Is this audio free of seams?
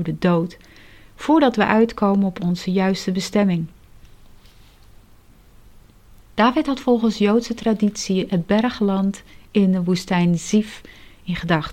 yes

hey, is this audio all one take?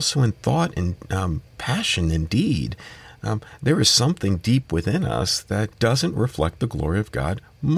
no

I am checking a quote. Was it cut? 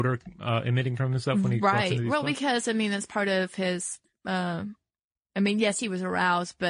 no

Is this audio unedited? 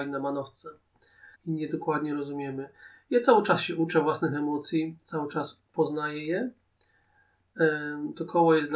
no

